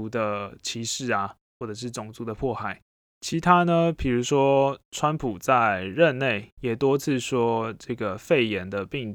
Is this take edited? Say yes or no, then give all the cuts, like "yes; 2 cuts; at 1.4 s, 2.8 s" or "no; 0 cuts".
yes; 1 cut; at 2.9 s